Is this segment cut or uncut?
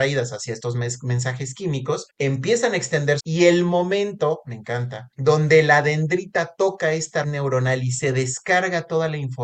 cut